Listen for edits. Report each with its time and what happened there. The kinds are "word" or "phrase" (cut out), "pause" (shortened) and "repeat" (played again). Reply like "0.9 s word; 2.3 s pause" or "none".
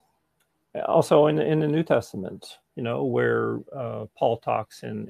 3.7 s pause

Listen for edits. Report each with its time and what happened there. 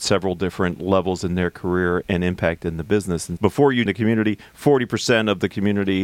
2.0 s word; 3.4 s word; 3.9 s word

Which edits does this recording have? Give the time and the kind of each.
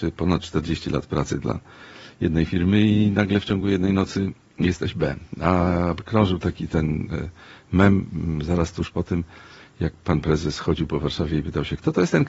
none

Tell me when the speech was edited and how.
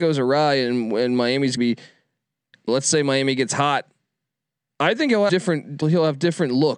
1.6 s word; 2.7 s word; 5.3 s word; 5.8 s word

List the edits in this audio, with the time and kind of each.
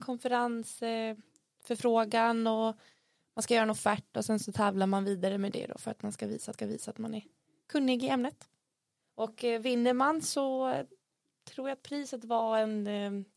6.5 s repeat

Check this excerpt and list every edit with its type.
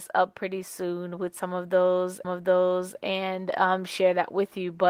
2.2 s repeat

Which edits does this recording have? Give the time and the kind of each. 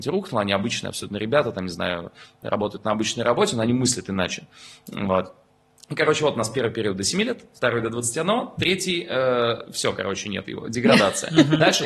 none

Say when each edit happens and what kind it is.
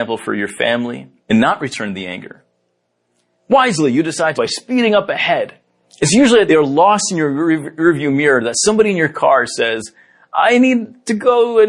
1.2 s pause; 4.3 s phrase; 5.8 s pause; 6.5 s phrase

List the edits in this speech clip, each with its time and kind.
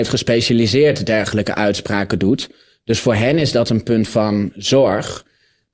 none

